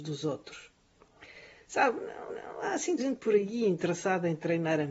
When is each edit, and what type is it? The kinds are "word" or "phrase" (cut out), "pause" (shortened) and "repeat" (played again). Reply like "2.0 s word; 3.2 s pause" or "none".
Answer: 2.3 s repeat; 3.0 s word